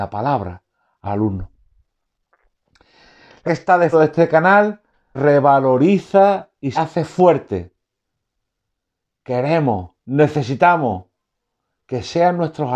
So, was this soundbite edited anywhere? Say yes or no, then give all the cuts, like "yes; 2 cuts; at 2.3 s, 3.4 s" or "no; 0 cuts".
yes; 5 cuts; at 1.0 s, 3.4 s, 3.9 s, 5.1 s, 6.7 s